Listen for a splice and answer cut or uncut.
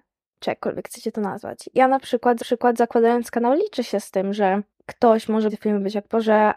cut